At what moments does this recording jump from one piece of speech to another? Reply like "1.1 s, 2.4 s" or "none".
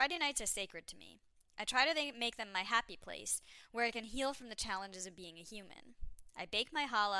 none